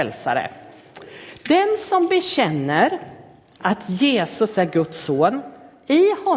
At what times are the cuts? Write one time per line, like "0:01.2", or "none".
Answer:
none